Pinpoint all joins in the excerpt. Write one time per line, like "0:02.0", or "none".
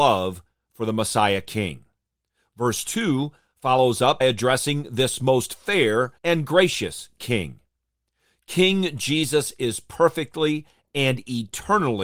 0:04.2
0:06.2